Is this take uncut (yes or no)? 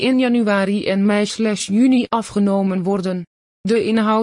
yes